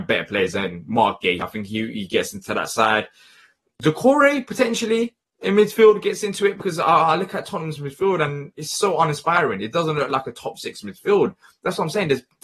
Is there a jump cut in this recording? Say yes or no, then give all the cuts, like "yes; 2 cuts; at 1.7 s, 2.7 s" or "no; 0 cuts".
no; 0 cuts